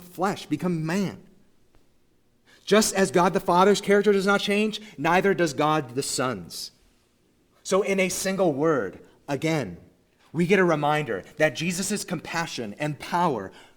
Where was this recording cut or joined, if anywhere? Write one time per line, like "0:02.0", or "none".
none